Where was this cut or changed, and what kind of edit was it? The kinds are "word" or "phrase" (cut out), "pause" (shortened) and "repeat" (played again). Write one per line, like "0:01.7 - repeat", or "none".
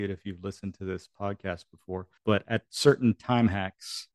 0:02.2 - pause